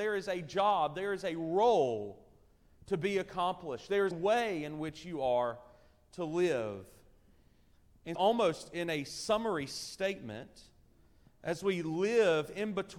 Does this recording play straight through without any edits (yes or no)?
no